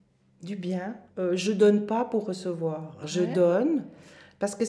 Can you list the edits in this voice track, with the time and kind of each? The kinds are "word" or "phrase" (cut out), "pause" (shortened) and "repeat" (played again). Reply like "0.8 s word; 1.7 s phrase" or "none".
1.1 s pause